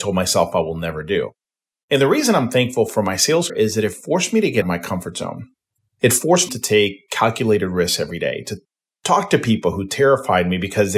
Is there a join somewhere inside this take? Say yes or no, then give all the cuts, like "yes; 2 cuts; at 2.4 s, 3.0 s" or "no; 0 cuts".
yes; 3 cuts; at 3.5 s, 4.6 s, 6.5 s